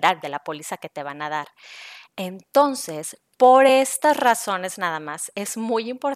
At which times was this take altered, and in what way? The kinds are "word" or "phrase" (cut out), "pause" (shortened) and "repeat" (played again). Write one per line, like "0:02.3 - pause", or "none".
none